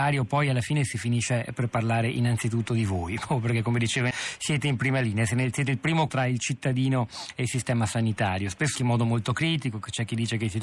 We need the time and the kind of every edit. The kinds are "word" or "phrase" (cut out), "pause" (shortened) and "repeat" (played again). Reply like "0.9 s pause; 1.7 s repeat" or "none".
4.1 s word; 6.1 s word; 8.8 s word